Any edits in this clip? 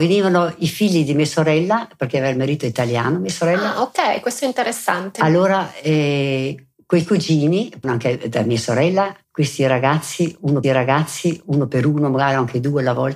yes; 4 cuts; at 6.7 s, 7.8 s, 9.2 s, 10.6 s

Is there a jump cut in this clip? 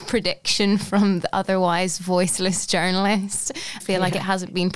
yes; 1 cut; at 3.8 s

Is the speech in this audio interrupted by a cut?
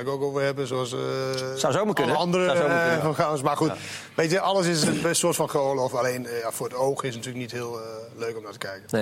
no; 0 cuts

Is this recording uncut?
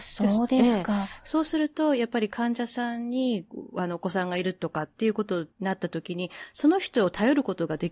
no; 1 cut; at 5.5 s

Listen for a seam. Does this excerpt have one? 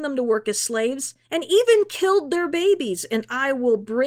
yes; 1 cut; at 1.2 s

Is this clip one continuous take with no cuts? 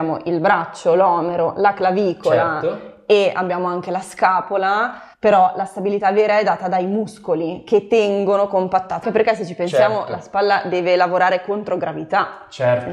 no; 2 cuts; at 5.1 s, 9.0 s

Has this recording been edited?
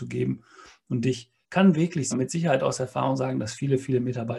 yes; 2 cuts; at 1.4 s, 2.1 s

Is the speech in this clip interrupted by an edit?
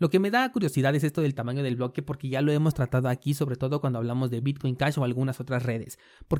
yes; 1 cut; at 4.4 s

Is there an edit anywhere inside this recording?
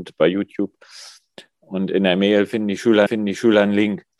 yes; 1 cut; at 3.1 s

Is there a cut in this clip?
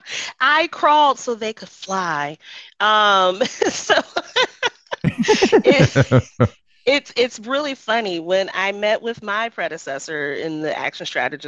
no; 0 cuts

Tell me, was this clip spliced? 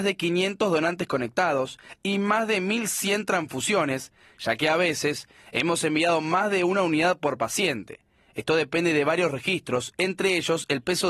no; 0 cuts

